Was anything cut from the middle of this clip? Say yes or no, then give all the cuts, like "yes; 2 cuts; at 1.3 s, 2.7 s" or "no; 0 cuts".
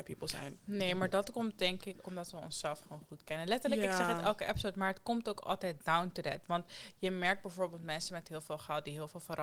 yes; 1 cut; at 2.0 s